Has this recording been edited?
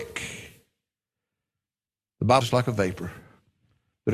yes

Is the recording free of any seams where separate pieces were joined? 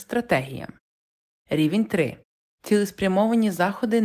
yes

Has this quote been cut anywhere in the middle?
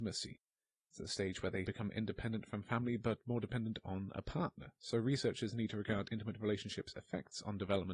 no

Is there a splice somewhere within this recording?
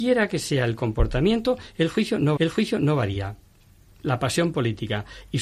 yes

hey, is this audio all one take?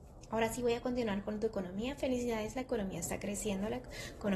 yes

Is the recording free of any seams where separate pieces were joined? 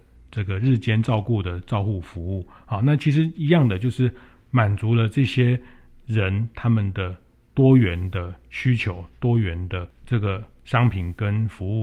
yes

